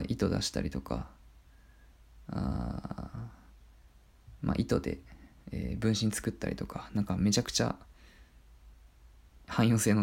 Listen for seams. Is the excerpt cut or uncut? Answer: uncut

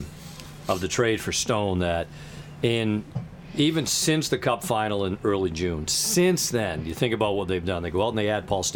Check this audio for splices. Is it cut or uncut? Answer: uncut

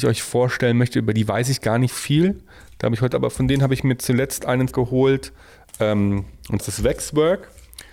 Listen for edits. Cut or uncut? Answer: cut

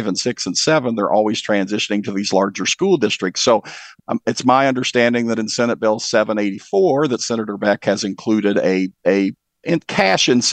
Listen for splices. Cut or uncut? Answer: uncut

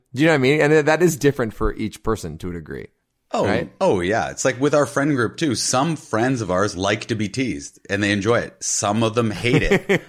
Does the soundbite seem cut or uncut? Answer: uncut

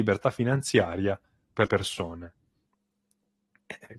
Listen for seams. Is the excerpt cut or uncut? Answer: cut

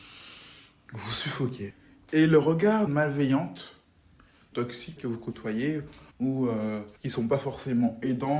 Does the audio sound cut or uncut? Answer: cut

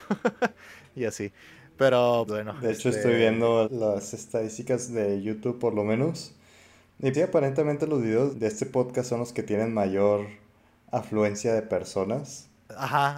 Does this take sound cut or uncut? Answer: cut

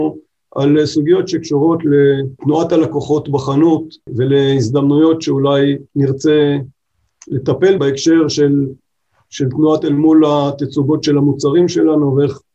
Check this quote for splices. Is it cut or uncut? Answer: cut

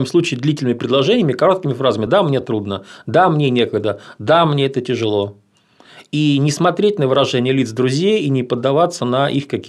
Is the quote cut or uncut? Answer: uncut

